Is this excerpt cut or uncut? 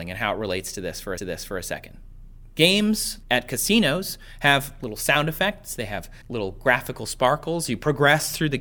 cut